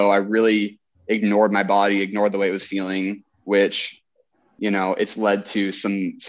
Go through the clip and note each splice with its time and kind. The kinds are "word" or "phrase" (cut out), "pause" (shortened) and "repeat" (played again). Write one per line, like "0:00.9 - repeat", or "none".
none